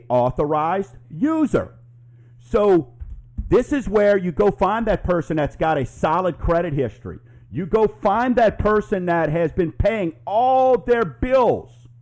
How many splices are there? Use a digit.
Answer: 0